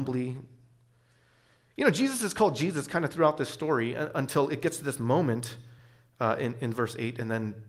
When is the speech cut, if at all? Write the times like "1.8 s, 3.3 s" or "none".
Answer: none

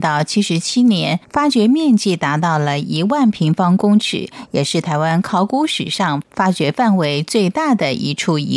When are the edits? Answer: 1.2 s

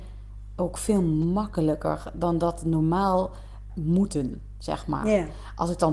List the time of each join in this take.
3.7 s

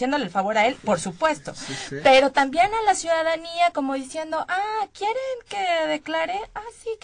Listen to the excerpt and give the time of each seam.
none

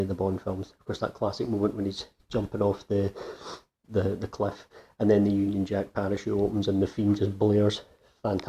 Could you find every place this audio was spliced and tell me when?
none

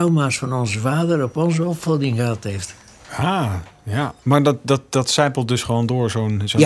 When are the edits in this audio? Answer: 3.0 s, 4.2 s

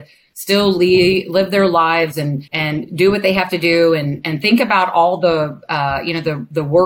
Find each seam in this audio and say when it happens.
2.5 s

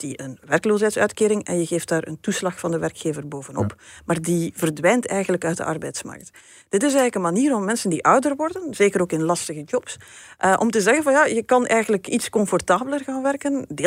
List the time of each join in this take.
none

